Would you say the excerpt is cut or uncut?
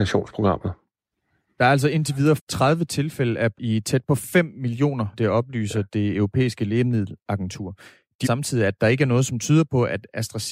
cut